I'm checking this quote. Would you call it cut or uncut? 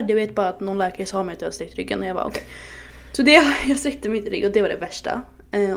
uncut